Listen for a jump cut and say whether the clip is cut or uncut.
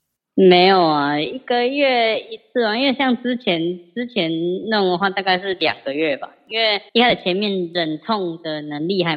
cut